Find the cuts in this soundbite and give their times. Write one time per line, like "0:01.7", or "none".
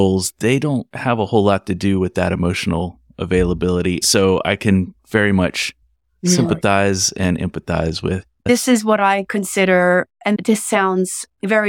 none